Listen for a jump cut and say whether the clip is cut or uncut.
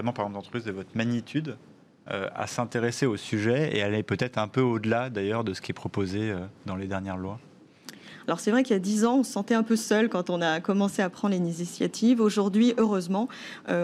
uncut